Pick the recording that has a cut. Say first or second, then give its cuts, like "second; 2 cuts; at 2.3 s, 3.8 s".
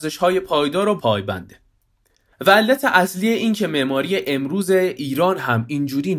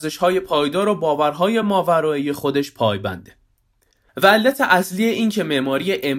first; 1 cut; at 1.0 s